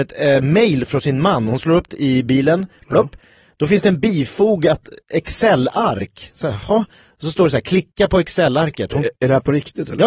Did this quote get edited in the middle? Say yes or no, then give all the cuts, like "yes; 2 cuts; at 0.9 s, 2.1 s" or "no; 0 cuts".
yes; 1 cut; at 1.9 s